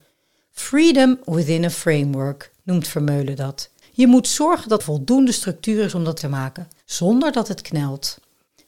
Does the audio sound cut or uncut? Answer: cut